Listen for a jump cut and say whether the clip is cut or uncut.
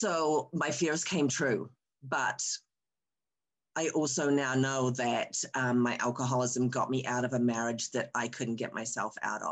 uncut